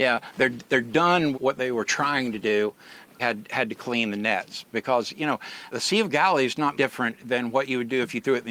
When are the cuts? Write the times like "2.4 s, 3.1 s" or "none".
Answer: 1.3 s, 3.2 s, 5.7 s, 6.7 s